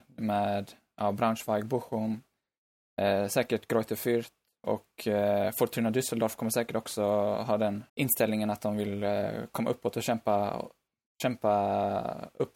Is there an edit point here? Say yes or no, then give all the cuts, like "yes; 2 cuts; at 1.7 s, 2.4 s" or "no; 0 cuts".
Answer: yes; 1 cut; at 7.9 s